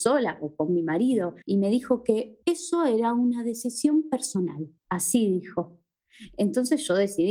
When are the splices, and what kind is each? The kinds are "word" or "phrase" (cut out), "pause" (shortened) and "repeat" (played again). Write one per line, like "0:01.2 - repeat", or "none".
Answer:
0:01.4 - pause
0:02.4 - pause
0:04.8 - pause